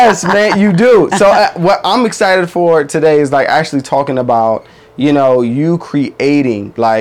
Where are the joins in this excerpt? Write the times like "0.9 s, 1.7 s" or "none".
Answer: none